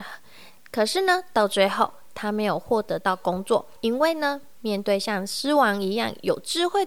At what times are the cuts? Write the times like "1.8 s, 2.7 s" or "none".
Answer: 3.8 s